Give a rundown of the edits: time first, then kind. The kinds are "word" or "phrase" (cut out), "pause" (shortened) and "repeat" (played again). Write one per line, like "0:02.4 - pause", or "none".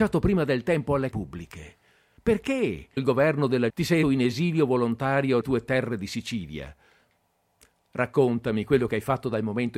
0:01.1 - word
0:03.0 - word
0:03.7 - word
0:04.0 - word
0:05.4 - word